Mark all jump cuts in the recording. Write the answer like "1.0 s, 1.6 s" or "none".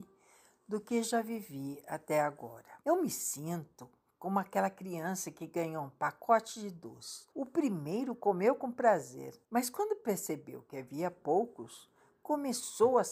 2.8 s, 7.3 s, 9.4 s